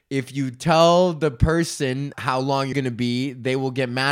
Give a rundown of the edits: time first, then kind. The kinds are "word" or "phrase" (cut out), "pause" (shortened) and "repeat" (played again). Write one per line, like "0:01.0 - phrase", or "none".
0:02.1 - word
0:02.7 - word